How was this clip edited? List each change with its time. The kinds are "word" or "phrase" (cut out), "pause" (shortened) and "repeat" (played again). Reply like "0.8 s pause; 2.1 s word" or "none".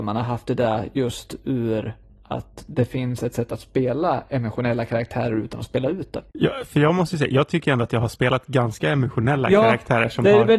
6.3 s pause